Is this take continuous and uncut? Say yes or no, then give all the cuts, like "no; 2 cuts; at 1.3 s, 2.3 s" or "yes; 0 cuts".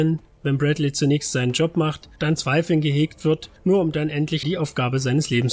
no; 3 cuts; at 2.4 s, 3.6 s, 4.4 s